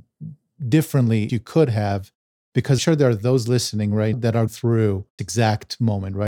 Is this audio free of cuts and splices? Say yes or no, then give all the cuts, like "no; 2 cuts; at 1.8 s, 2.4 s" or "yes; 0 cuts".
no; 5 cuts; at 1.3 s, 2.8 s, 4.1 s, 4.5 s, 5.2 s